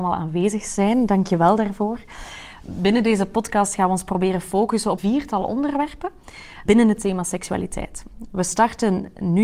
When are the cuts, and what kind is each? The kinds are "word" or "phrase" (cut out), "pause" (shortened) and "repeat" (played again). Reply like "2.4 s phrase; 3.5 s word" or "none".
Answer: 5.0 s word; 6.7 s word